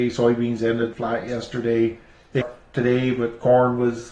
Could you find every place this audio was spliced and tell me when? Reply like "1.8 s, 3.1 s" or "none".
0.9 s, 2.4 s